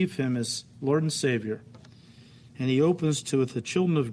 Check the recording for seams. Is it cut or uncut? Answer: uncut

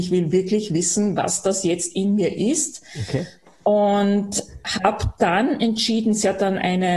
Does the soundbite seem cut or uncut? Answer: uncut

